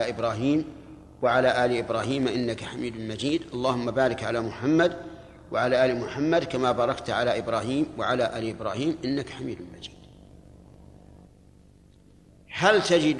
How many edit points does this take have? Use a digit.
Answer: 0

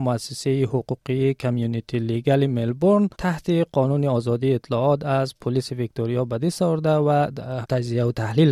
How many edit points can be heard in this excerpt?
2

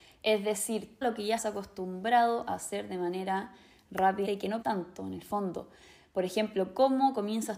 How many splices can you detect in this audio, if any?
4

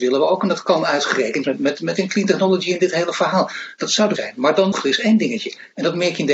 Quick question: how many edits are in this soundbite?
4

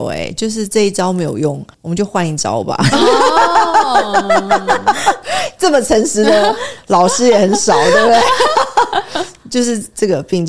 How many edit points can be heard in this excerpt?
1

